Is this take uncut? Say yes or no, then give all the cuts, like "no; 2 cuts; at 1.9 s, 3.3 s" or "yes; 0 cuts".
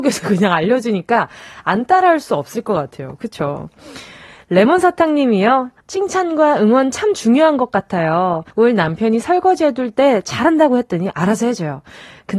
no; 2 cuts; at 5.8 s, 8.5 s